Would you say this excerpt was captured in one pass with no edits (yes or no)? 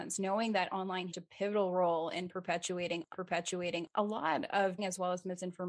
no